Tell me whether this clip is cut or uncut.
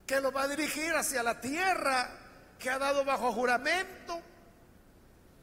uncut